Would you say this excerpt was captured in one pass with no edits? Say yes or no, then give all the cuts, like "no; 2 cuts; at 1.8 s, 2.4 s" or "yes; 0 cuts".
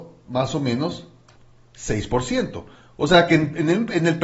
yes; 0 cuts